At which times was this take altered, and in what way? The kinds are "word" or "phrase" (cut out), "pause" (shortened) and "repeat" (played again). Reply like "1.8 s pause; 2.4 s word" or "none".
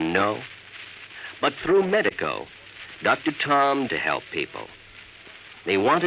3.9 s phrase